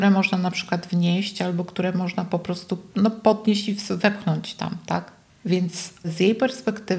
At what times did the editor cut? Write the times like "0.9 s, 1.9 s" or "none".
none